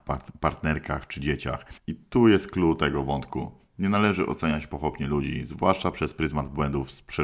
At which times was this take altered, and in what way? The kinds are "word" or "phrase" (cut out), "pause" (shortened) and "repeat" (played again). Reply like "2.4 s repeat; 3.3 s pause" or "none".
1.8 s pause